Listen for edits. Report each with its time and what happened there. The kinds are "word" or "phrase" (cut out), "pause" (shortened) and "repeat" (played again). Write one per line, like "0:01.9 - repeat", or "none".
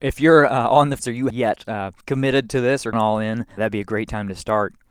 0:01.0 - word
0:01.3 - phrase
0:02.0 - pause
0:02.9 - word
0:03.6 - word